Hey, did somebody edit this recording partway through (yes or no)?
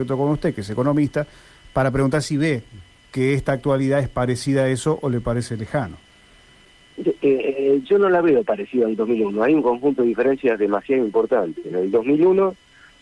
no